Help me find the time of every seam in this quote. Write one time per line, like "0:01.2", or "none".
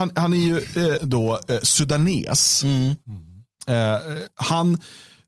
0:01.0